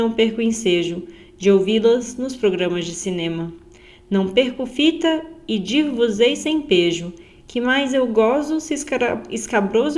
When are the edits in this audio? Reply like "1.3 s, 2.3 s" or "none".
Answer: none